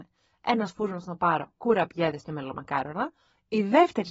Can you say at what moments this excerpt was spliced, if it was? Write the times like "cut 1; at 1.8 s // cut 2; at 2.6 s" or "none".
none